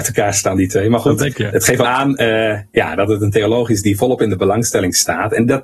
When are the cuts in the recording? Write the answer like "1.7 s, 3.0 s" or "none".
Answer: 1.3 s, 1.8 s